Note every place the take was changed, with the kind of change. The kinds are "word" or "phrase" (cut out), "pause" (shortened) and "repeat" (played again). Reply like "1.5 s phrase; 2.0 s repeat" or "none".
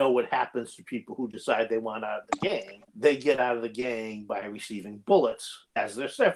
2.9 s pause